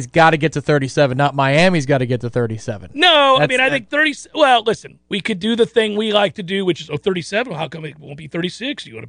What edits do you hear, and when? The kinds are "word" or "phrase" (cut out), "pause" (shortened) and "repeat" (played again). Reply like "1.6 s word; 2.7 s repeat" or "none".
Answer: 5.0 s pause